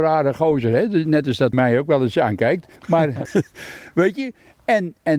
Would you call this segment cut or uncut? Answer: cut